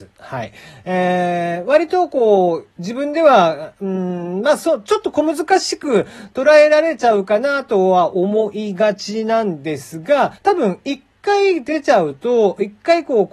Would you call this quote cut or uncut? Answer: cut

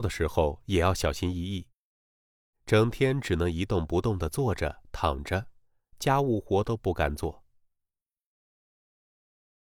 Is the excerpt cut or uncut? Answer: uncut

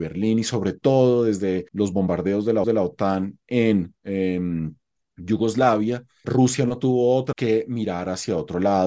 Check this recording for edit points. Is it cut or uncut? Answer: cut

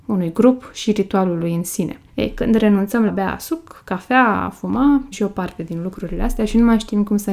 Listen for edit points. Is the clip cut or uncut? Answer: cut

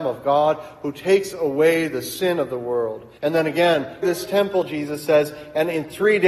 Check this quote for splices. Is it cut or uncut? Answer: cut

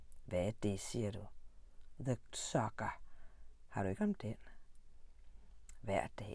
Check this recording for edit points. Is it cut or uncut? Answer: cut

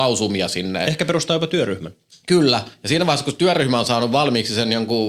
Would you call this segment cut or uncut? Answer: uncut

